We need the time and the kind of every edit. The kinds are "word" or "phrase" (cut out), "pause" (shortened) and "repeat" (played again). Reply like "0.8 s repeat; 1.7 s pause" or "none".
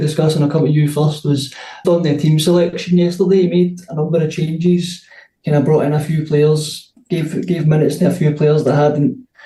1.8 s word